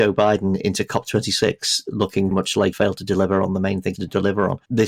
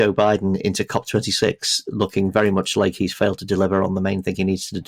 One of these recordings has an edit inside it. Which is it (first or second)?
first